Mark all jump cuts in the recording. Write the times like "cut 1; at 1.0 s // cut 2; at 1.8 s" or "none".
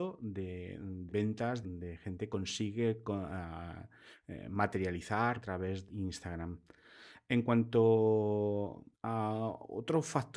cut 1; at 1.1 s // cut 2; at 1.6 s // cut 3; at 2.3 s // cut 4; at 5.4 s // cut 5; at 5.9 s // cut 6; at 8.9 s